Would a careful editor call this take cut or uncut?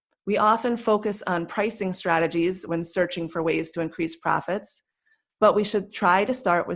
uncut